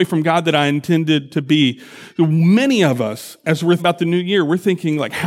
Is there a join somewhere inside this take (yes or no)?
yes